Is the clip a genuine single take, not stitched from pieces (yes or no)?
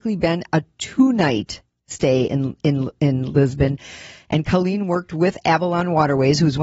yes